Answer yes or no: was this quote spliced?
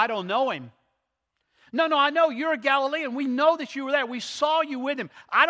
no